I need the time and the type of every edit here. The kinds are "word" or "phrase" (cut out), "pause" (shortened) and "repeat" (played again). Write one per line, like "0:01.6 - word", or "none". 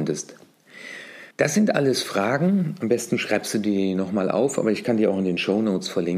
0:01.3 - pause